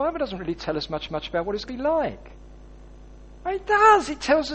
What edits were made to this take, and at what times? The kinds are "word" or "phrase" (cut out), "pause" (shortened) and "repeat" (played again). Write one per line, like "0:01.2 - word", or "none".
0:01.1 - repeat
0:01.7 - word

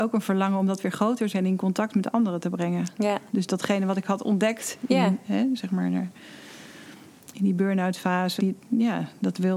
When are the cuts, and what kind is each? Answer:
0:01.3 - word
0:08.4 - word

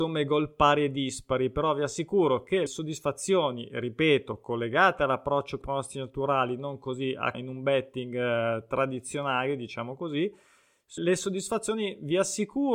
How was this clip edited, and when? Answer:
0:02.7 - word
0:05.6 - word
0:07.3 - word
0:11.0 - word

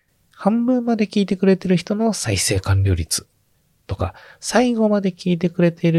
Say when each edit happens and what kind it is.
none

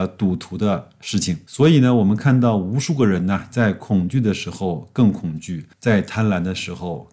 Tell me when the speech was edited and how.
0:05.7 - pause

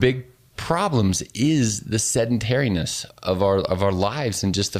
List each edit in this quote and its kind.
0:03.1 - word

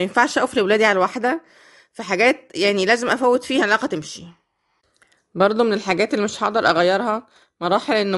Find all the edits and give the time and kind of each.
0:03.6 - word

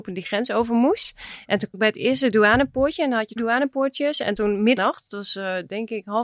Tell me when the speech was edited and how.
0:01.7 - word
0:03.4 - word
0:04.4 - word
0:04.8 - word

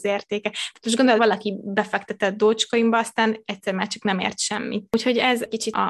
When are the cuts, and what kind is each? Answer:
0:01.2 - word

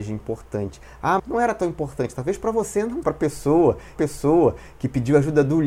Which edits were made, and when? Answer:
0:01.2 - word
0:03.0 - phrase
0:04.0 - repeat

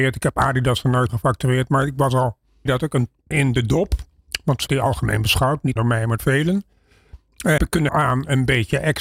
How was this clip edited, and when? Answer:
0:01.1 - word
0:02.7 - word
0:03.3 - word
0:04.7 - word
0:05.8 - word
0:06.2 - word
0:07.6 - word
0:07.9 - word

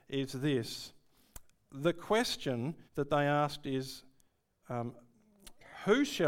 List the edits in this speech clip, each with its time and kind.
0:02.9 - pause

